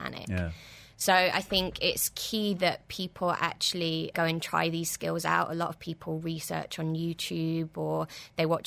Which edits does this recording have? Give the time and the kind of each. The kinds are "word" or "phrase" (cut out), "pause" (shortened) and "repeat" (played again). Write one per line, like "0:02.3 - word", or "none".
0:04.1 - word